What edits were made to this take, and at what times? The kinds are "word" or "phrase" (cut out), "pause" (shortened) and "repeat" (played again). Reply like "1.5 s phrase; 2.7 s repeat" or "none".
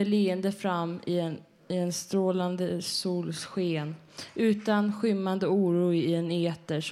none